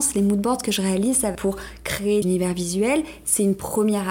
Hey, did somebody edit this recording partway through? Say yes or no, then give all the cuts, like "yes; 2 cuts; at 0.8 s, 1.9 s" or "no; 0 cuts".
yes; 2 cuts; at 1.3 s, 2.2 s